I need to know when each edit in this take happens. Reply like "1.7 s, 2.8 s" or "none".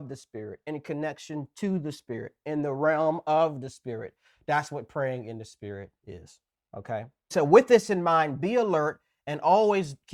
none